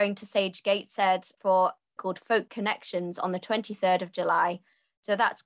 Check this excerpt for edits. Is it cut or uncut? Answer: cut